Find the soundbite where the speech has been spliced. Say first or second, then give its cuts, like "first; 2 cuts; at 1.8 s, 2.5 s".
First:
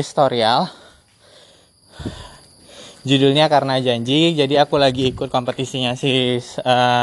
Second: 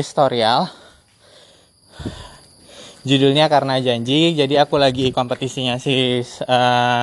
second; 1 cut; at 5.1 s